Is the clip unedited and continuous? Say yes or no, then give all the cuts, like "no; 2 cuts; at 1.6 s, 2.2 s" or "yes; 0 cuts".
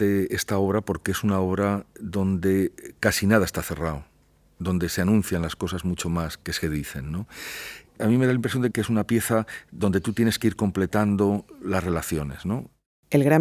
yes; 0 cuts